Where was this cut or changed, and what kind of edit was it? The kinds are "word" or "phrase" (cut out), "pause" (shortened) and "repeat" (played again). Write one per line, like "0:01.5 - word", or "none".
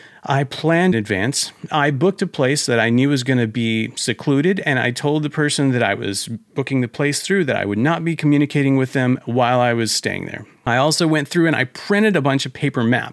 0:00.9 - phrase